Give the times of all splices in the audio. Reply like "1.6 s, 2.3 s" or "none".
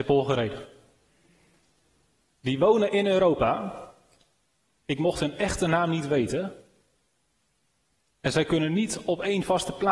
none